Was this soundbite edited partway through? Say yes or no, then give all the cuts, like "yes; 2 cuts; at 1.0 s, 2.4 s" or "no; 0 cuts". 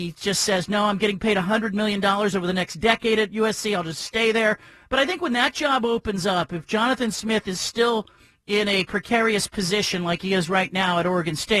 no; 0 cuts